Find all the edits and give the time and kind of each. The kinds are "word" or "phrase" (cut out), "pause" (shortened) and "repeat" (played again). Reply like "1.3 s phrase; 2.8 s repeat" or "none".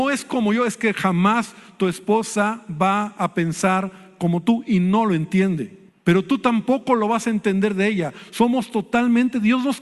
5.9 s pause